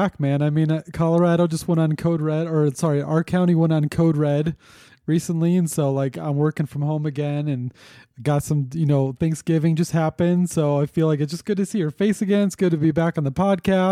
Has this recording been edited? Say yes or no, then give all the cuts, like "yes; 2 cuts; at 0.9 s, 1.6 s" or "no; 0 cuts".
no; 0 cuts